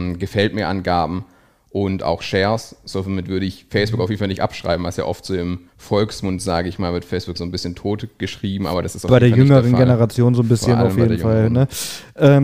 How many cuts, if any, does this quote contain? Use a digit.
2